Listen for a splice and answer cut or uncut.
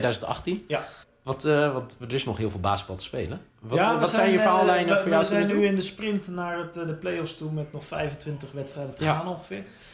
cut